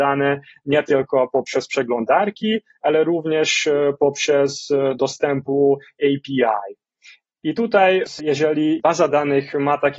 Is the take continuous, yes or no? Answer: yes